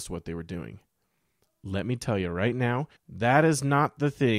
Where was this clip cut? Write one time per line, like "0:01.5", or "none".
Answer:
0:03.0